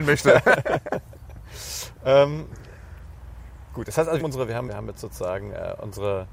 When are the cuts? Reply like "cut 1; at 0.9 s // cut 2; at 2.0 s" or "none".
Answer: cut 1; at 4.2 s // cut 2; at 4.7 s